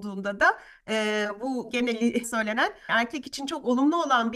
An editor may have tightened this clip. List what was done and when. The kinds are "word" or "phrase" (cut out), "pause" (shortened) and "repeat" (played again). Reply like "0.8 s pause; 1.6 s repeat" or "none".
2.2 s word; 2.9 s word